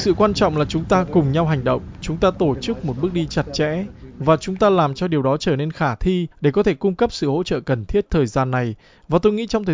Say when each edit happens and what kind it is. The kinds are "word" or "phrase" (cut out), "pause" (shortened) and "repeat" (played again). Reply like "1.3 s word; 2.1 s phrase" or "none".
6.3 s pause; 8.1 s phrase